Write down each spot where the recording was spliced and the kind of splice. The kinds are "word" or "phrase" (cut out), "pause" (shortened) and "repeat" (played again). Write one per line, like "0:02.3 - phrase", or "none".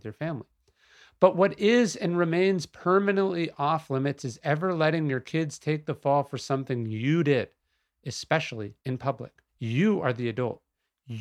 0:08.8 - pause
0:09.5 - pause